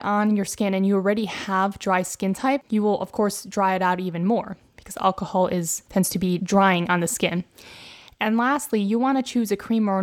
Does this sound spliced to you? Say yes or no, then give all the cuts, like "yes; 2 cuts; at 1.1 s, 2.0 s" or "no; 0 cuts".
no; 0 cuts